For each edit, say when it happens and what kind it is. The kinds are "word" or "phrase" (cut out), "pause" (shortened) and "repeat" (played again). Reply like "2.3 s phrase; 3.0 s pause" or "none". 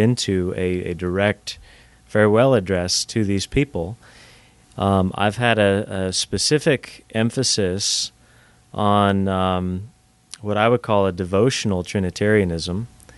none